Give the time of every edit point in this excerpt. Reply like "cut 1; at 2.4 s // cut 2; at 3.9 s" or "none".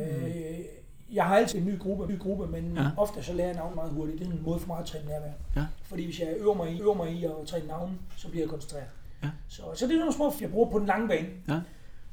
cut 1; at 1.5 s // cut 2; at 2.1 s // cut 3; at 3.7 s // cut 4; at 6.8 s // cut 5; at 10.4 s